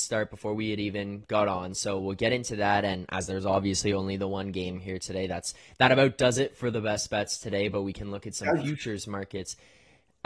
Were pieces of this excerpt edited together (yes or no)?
no